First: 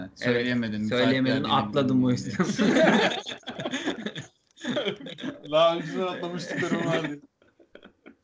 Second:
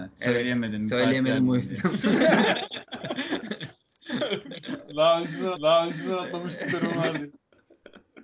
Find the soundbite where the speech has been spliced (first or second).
second